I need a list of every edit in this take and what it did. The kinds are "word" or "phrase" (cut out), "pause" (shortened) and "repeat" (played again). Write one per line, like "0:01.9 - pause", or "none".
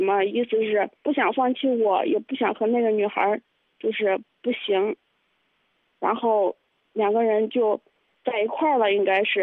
0:01.0 - pause